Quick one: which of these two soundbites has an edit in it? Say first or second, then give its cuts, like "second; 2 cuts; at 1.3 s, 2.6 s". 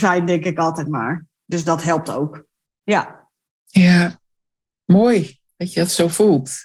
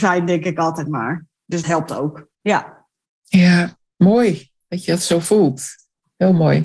second; 3 cuts; at 1.6 s, 2.3 s, 3.9 s